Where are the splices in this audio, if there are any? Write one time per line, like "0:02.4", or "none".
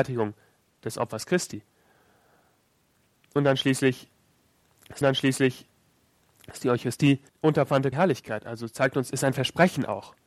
0:05.0
0:07.3
0:07.9